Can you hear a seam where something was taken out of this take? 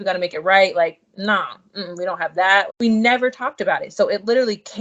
yes; 1 cut; at 2.7 s

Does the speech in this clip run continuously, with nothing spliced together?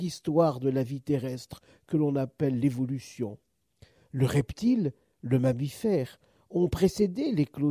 yes; 0 cuts

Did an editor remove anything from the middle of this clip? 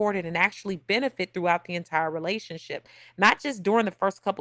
no; 0 cuts

